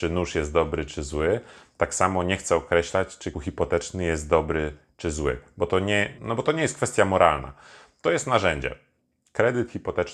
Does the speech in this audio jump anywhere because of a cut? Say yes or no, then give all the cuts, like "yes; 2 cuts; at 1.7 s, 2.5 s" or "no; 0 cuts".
yes; 2 cuts; at 3.3 s, 6.2 s